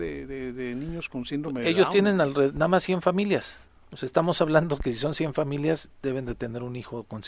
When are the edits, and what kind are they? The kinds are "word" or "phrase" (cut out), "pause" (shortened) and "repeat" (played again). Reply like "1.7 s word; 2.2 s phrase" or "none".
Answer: none